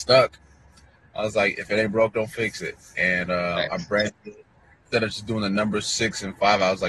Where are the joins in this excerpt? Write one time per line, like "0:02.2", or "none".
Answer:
none